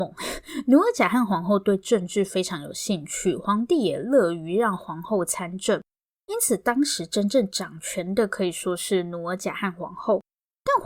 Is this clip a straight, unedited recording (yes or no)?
yes